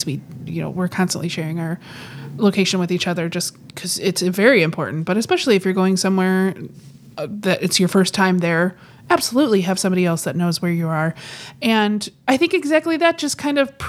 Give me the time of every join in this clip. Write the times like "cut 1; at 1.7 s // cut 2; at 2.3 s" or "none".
none